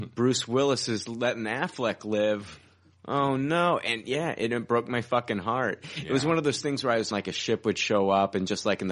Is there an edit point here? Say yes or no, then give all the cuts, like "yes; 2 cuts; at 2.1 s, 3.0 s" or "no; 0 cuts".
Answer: yes; 1 cut; at 7.1 s